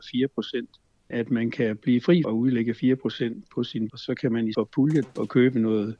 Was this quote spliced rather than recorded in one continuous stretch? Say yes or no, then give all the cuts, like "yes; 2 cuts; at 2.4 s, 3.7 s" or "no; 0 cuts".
yes; 5 cuts; at 1.1 s, 2.2 s, 3.9 s, 4.5 s, 5.0 s